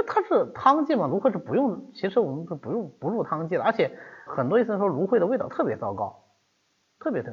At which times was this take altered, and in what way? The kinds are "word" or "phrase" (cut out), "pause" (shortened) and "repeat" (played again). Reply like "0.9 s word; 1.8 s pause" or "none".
4.3 s word